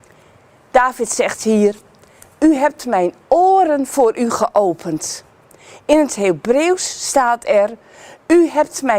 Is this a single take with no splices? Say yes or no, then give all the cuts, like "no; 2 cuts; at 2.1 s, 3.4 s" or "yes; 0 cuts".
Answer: yes; 0 cuts